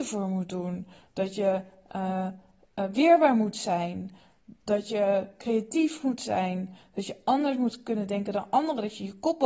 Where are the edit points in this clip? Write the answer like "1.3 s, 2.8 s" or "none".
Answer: none